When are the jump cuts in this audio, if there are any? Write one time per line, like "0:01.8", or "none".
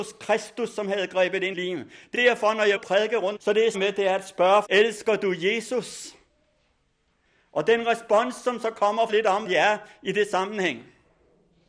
0:01.5
0:02.1
0:02.8
0:03.4
0:03.7
0:04.6
0:09.1
0:09.4